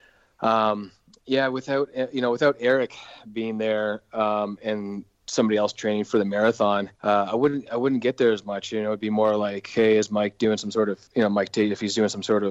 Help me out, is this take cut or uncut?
cut